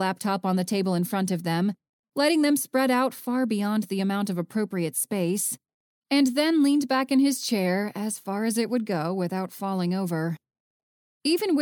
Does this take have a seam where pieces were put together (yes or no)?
no